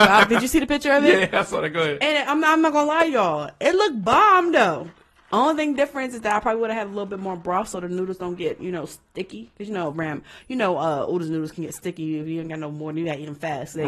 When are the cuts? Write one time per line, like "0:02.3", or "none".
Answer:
none